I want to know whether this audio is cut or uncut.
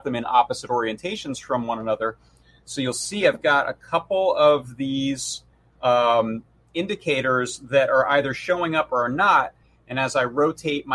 uncut